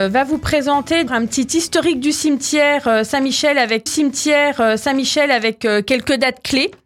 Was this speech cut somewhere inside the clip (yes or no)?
yes